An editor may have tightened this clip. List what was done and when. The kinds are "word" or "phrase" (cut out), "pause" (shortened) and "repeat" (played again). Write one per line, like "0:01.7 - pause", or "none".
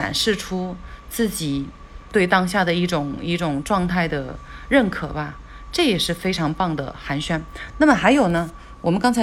0:02.1 - word